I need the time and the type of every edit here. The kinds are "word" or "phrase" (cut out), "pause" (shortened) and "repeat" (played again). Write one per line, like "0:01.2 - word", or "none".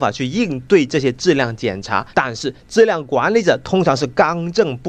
0:02.1 - pause